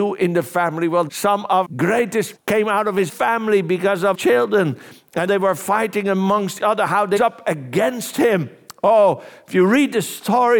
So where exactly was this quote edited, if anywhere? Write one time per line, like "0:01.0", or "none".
0:01.1
0:01.6
0:02.4
0:03.1
0:04.1
0:05.3
0:06.6
0:07.2